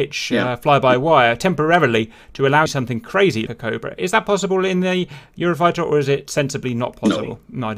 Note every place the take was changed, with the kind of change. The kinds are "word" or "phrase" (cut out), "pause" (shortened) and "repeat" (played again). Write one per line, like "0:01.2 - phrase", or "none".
0:02.7 - phrase
0:03.5 - word